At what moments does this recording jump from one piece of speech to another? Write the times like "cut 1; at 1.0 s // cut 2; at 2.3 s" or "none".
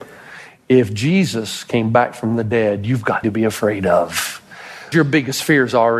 cut 1; at 3.2 s // cut 2; at 4.9 s